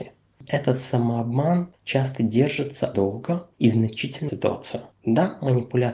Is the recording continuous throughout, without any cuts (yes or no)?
no